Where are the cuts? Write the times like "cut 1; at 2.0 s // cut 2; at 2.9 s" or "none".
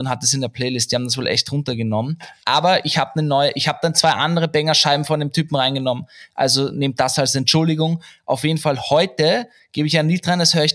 none